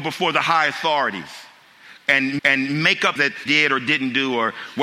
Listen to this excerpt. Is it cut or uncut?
cut